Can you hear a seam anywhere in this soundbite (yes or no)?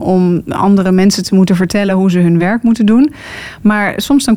no